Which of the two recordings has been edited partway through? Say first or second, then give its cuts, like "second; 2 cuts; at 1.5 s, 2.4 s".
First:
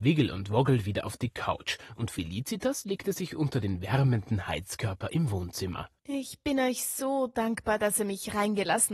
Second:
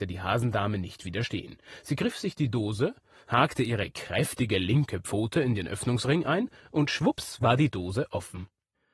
first; 1 cut; at 6.0 s